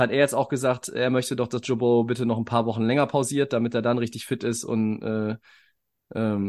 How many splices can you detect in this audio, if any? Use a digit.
0